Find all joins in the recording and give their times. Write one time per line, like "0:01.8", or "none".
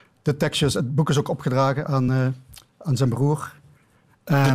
none